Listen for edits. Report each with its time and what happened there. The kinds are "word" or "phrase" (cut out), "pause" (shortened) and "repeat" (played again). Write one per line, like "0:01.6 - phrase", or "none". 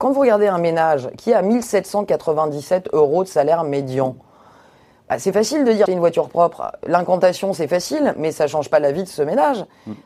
0:05.9 - word